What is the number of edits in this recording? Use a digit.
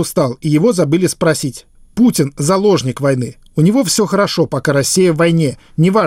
0